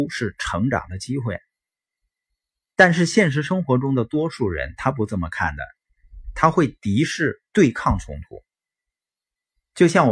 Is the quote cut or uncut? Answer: uncut